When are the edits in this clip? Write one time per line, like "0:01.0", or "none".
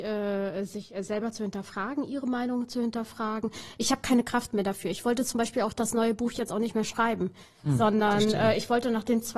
none